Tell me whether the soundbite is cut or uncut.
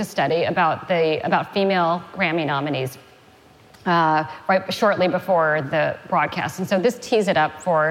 uncut